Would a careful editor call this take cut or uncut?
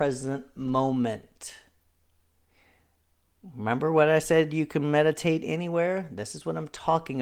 uncut